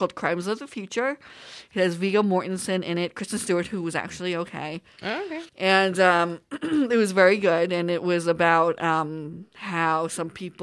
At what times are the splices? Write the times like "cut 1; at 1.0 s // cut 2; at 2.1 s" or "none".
cut 1; at 5.5 s

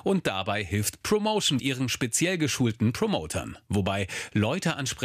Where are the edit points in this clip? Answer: cut 1; at 1.6 s

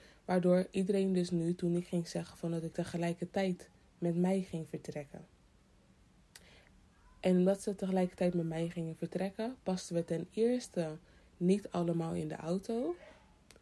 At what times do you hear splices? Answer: cut 1; at 2.7 s

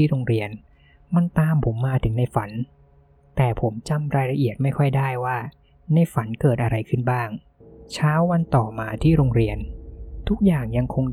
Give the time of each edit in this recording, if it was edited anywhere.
cut 1; at 7.6 s

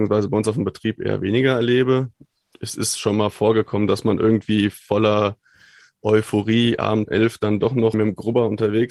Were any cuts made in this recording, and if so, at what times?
cut 1; at 7.1 s // cut 2; at 7.9 s

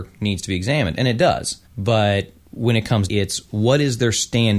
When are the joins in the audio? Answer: cut 1; at 1.7 s // cut 2; at 3.1 s

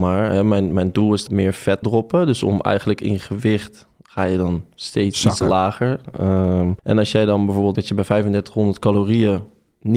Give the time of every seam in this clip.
cut 1; at 1.3 s // cut 2; at 1.8 s // cut 3; at 6.8 s // cut 4; at 7.7 s

